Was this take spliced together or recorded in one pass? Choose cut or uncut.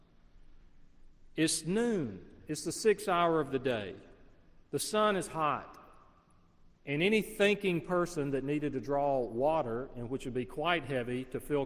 uncut